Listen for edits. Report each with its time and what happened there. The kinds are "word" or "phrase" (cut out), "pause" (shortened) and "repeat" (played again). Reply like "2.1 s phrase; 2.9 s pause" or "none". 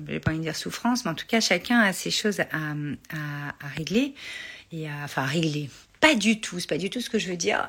none